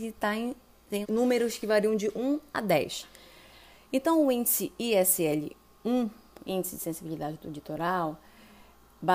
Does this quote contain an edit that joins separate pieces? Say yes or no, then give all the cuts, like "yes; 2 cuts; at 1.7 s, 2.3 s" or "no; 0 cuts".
yes; 2 cuts; at 1.0 s, 6.4 s